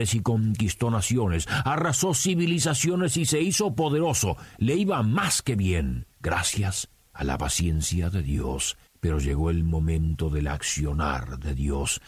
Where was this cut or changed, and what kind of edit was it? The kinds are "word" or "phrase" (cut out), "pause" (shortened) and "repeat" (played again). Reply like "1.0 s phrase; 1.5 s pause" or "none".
6.1 s pause; 8.9 s pause